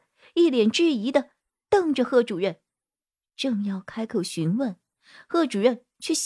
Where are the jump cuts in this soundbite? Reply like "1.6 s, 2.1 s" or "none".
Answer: none